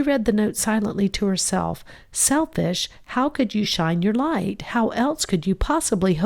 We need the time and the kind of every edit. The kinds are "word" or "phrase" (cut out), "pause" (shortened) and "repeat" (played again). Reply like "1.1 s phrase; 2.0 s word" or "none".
none